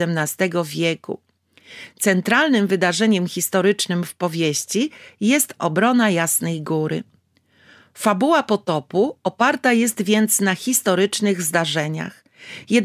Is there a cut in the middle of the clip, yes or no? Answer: no